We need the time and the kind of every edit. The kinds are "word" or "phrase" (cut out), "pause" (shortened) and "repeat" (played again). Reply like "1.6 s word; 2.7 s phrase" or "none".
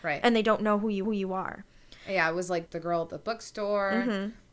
1.0 s repeat; 2.7 s word